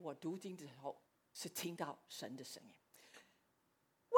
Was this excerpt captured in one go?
no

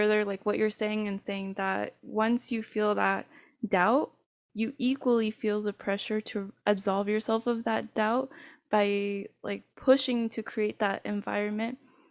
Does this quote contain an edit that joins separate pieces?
no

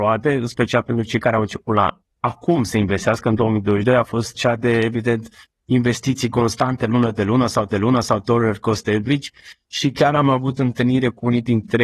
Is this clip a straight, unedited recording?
no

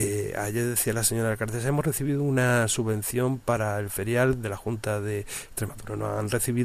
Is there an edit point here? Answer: no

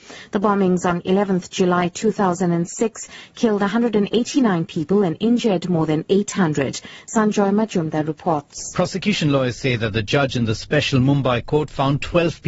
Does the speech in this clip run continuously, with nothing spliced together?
no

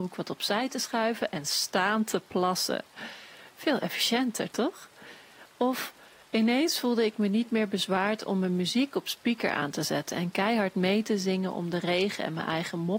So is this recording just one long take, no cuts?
yes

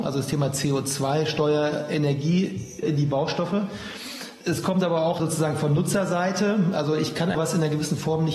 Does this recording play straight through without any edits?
no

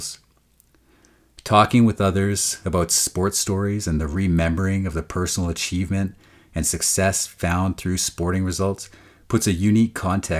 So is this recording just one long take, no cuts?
yes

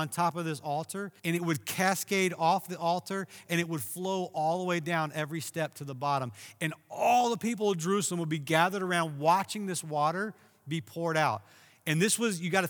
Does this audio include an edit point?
yes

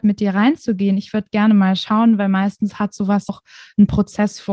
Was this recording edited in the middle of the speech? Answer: yes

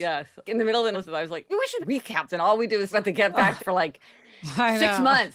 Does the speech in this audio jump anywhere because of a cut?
yes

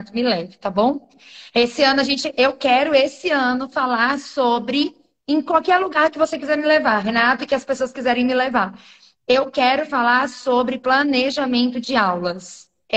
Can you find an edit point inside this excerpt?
no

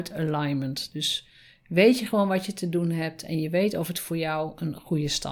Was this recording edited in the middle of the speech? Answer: no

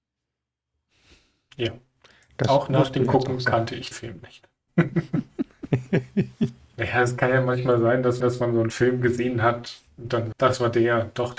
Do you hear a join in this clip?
yes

